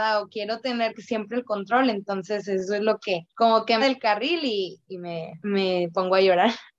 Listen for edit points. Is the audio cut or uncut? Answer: cut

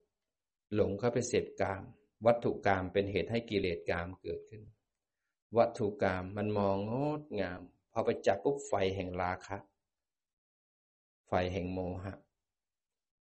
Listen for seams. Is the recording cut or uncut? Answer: uncut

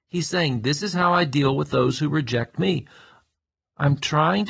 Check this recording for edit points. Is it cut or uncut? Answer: uncut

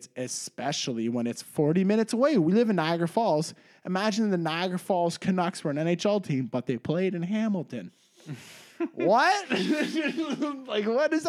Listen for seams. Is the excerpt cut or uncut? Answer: uncut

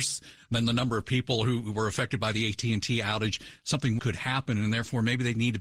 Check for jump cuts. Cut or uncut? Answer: cut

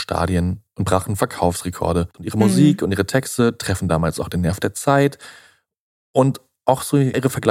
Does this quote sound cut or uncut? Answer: uncut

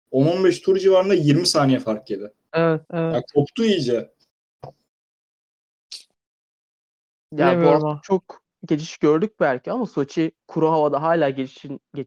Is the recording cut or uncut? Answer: cut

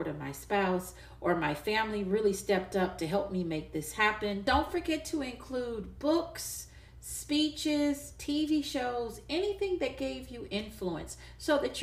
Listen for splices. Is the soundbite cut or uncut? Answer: uncut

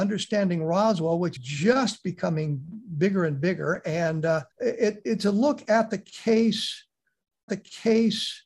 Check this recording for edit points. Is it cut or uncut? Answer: cut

